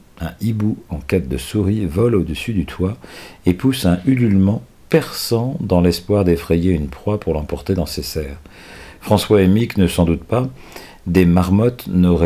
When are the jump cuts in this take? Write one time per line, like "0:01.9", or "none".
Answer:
none